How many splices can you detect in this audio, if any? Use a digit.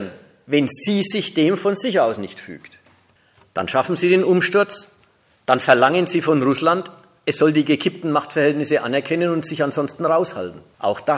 0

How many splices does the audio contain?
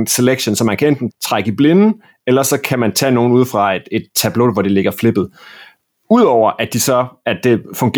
1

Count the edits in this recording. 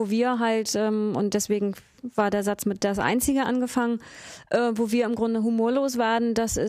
0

